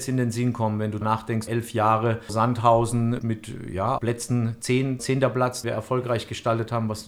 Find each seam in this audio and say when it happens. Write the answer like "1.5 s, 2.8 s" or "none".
1.0 s, 1.5 s, 2.3 s, 3.2 s, 4.0 s, 5.0 s, 5.6 s